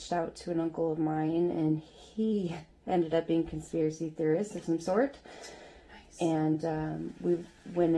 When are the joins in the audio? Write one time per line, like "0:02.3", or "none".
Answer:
none